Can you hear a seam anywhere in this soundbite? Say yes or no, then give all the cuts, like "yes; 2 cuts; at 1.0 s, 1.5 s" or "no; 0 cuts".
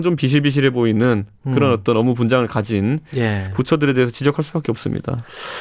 no; 0 cuts